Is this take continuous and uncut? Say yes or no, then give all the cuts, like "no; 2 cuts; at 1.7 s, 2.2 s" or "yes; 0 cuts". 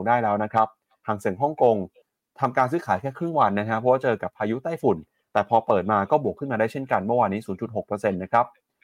yes; 0 cuts